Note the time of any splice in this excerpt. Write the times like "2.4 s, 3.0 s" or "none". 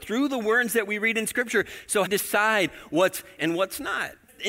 2.1 s, 3.4 s